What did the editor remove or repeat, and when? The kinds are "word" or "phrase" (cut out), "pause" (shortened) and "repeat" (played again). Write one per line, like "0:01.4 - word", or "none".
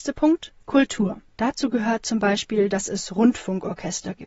0:01.3 - pause